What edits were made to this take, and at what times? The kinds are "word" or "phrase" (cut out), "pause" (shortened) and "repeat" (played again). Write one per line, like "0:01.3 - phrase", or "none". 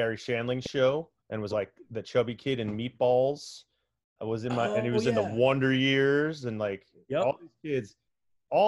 0:01.2 - pause
0:01.5 - word